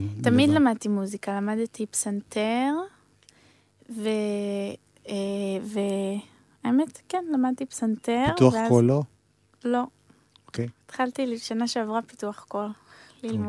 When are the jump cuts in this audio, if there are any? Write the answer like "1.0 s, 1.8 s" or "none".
none